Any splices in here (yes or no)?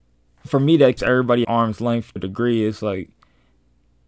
yes